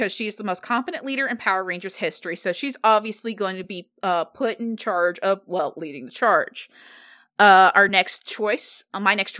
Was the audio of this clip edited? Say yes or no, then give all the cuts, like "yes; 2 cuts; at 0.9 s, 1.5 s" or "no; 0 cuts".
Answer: no; 0 cuts